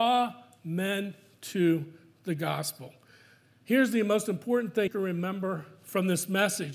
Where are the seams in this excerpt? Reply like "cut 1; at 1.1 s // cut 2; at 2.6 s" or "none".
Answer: cut 1; at 4.9 s